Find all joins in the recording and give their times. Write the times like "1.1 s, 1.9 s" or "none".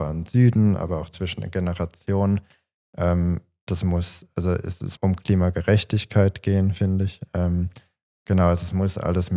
5.0 s